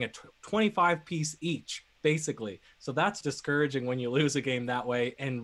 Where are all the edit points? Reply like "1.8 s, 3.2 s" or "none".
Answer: 3.2 s